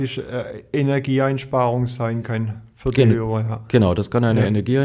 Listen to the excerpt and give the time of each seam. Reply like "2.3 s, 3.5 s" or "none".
none